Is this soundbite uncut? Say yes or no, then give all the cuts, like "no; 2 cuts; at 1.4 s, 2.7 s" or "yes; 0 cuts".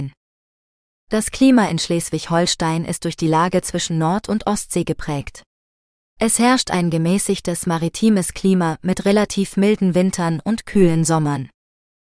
yes; 0 cuts